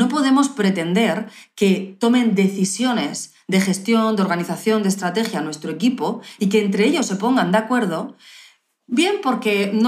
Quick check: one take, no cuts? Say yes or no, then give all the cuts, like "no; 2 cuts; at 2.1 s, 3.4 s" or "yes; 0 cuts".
yes; 0 cuts